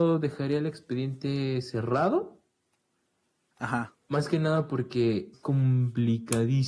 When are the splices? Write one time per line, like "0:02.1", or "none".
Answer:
0:04.0
0:05.3